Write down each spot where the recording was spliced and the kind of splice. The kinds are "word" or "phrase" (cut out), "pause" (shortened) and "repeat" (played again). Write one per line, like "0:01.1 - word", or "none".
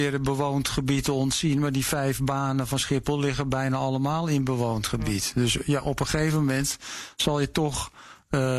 none